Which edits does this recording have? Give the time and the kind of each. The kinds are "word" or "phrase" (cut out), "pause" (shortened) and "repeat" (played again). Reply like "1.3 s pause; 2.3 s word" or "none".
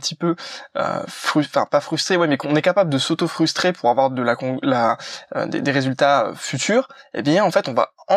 none